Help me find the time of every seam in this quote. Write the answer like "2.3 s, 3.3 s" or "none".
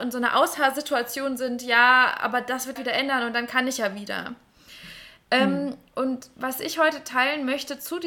2.8 s